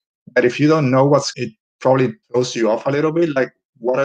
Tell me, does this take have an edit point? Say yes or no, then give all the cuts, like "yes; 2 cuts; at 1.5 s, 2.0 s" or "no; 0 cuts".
yes; 2 cuts; at 1.3 s, 2.2 s